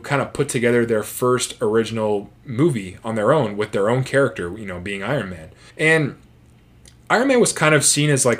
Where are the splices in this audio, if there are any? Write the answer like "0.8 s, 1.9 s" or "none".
5.7 s

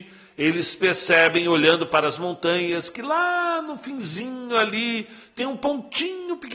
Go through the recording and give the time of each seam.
none

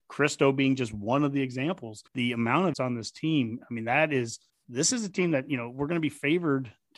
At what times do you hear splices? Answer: 2.1 s, 2.7 s, 4.5 s

